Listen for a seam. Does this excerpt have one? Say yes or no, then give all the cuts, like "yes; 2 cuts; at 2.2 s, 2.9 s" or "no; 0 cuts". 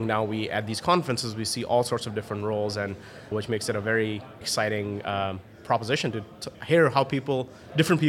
yes; 3 cuts; at 3.3 s, 4.4 s, 6.5 s